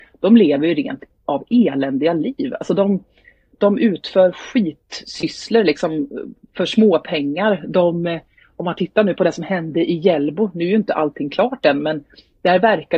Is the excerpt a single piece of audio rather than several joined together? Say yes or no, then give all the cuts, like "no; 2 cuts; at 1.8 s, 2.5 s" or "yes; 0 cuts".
yes; 0 cuts